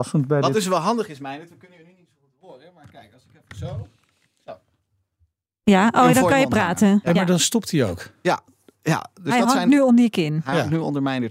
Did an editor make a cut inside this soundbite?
no; 0 cuts

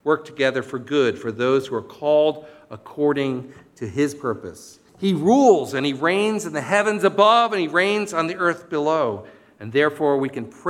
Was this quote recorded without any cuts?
no; 1 cut; at 4.9 s

